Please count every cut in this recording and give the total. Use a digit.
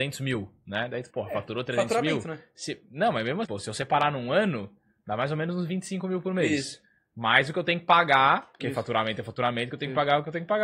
2